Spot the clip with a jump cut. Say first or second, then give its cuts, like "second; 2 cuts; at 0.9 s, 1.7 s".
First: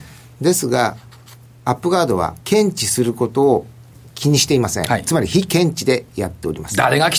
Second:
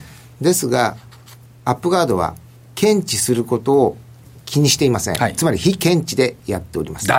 first; 1 cut; at 2.4 s